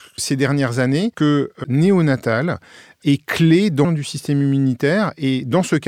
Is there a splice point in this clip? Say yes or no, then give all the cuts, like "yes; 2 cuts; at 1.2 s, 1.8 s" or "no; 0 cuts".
yes; 3 cuts; at 1.1 s, 1.6 s, 3.8 s